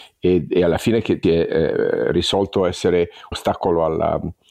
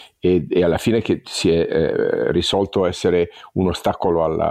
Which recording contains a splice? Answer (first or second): first